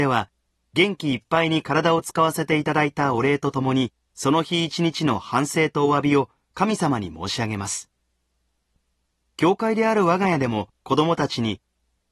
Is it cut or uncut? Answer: cut